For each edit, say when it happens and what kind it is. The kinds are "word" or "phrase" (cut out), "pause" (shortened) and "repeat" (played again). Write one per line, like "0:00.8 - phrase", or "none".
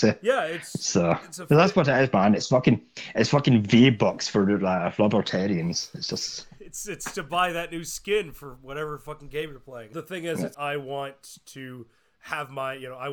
0:10.5 - word